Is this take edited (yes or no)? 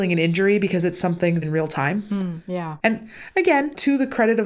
yes